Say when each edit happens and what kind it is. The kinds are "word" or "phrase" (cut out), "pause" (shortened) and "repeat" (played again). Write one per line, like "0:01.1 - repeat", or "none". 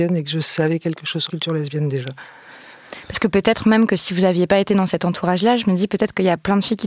0:01.3 - word